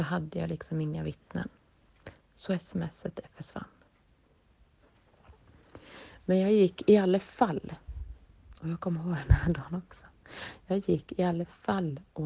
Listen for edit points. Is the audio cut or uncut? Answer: uncut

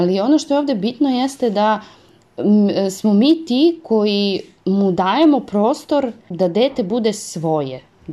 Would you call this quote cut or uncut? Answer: uncut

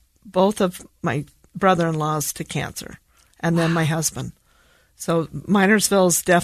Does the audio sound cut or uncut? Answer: uncut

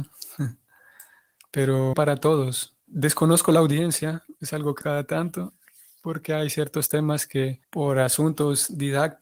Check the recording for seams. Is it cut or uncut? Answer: cut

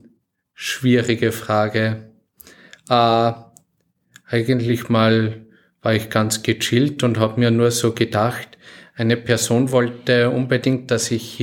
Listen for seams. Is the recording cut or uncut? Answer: uncut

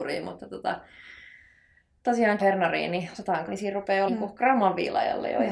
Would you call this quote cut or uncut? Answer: cut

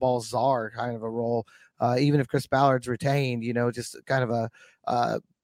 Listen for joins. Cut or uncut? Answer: uncut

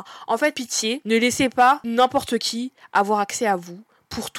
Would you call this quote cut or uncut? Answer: uncut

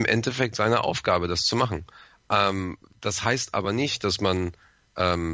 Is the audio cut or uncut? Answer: uncut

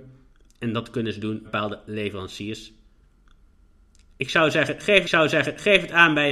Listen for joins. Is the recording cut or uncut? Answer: cut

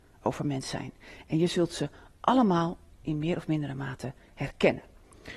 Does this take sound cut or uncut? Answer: uncut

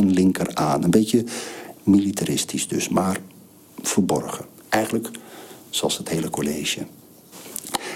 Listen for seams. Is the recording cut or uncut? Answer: uncut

